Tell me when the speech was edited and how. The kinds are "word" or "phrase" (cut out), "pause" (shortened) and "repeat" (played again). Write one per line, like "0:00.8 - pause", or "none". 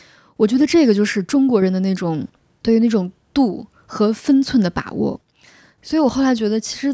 none

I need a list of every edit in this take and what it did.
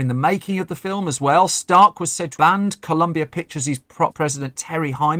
0:02.4 - word
0:04.1 - word

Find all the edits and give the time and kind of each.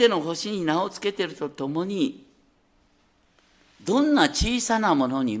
none

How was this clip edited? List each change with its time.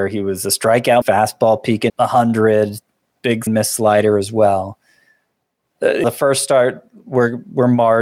0:01.0 - word
0:01.9 - word
0:03.5 - word
0:06.0 - word

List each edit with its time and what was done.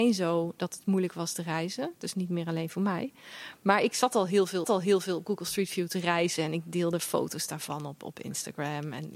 0:03.9 - word
0:04.6 - repeat

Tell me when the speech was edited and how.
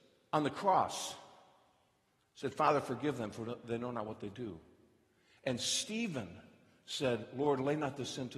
none

